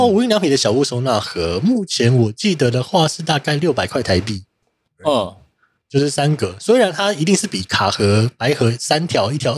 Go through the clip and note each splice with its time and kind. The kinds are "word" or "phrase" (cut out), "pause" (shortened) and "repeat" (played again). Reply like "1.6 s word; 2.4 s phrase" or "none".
none